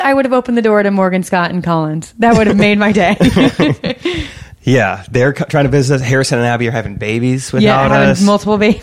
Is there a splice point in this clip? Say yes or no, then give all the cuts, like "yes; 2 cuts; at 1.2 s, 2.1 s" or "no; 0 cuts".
no; 0 cuts